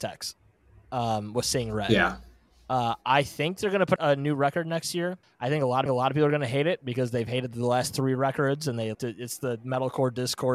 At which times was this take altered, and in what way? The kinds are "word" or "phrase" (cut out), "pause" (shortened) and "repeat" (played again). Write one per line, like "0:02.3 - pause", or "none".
0:04.0 - phrase
0:05.2 - pause
0:05.9 - repeat
0:08.9 - word